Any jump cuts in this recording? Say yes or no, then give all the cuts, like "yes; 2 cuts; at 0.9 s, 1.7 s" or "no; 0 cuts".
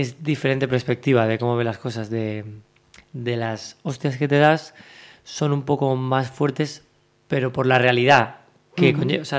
no; 0 cuts